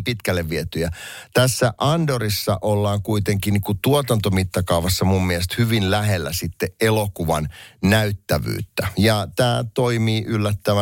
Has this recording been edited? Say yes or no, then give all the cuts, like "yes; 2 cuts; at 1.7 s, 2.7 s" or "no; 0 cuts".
no; 0 cuts